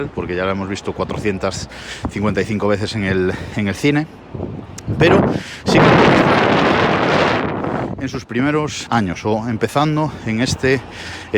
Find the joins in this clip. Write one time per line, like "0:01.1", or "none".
0:08.9